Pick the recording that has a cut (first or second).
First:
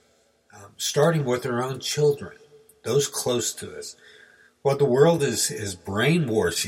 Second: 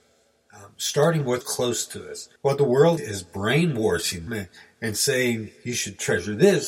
second